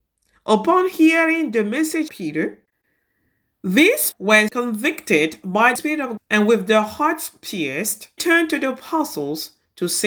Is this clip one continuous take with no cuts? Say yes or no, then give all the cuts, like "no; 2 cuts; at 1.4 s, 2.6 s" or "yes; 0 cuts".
no; 6 cuts; at 2.1 s, 4.1 s, 4.5 s, 5.8 s, 6.2 s, 8.2 s